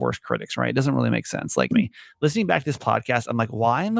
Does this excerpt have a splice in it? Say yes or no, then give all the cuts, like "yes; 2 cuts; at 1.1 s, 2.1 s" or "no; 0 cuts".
yes; 1 cut; at 1.7 s